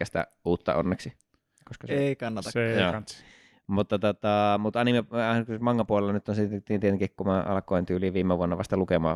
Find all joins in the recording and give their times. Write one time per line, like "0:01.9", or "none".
none